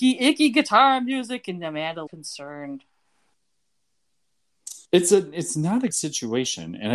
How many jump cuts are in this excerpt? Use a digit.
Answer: 3